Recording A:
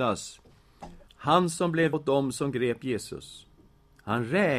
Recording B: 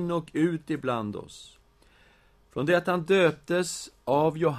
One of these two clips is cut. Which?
A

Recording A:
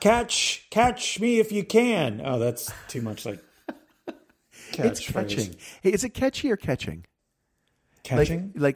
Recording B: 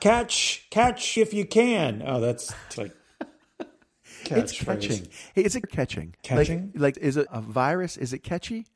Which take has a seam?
B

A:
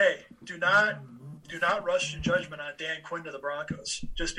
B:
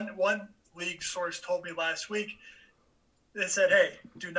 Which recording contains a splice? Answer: A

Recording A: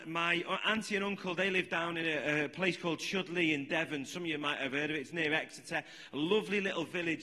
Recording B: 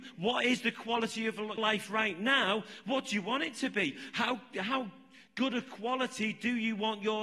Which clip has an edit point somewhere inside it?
B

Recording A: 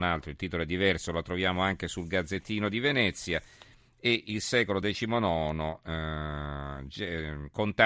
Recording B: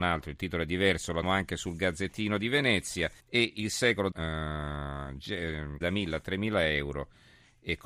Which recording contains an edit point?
B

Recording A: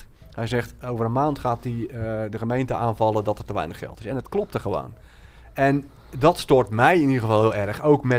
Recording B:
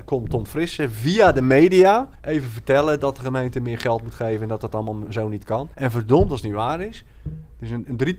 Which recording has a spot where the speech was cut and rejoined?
B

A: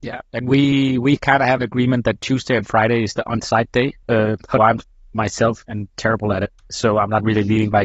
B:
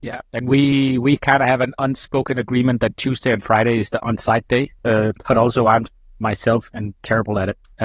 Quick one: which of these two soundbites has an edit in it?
A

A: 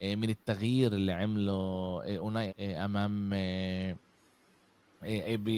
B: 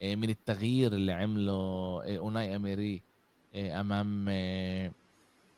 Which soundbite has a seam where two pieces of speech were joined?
A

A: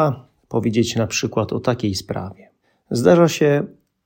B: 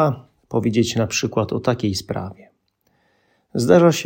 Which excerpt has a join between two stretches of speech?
A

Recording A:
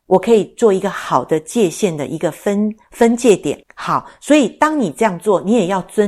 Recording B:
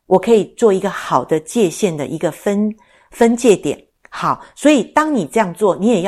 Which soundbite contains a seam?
A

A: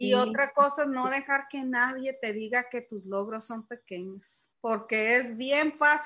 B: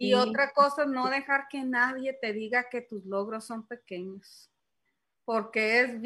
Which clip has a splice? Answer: A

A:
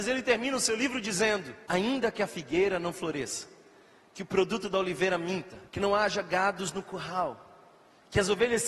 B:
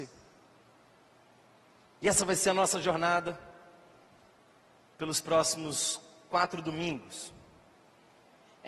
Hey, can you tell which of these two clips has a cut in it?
A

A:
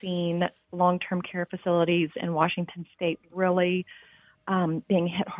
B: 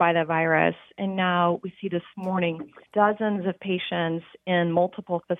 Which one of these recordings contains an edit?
B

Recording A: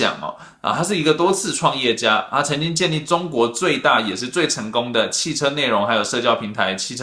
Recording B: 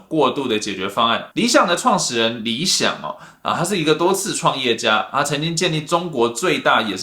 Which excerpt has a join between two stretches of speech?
B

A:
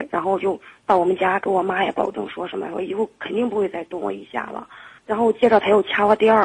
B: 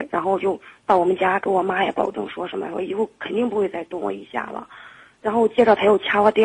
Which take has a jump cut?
A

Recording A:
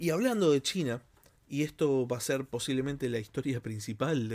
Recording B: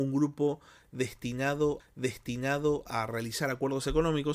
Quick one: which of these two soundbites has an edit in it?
B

